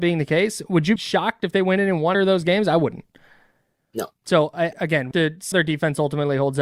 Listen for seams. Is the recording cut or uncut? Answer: cut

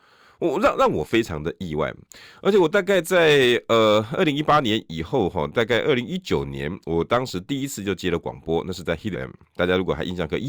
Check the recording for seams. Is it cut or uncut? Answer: cut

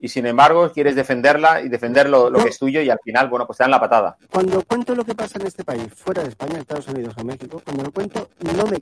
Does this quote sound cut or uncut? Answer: cut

